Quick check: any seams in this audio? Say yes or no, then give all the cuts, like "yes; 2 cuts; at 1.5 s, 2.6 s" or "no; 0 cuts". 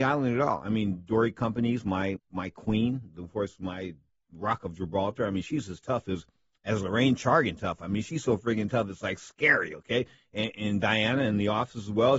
yes; 1 cut; at 2.2 s